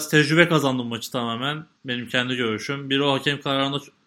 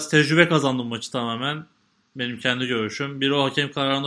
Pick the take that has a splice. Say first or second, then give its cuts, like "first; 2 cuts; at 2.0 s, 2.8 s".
first; 1 cut; at 1.8 s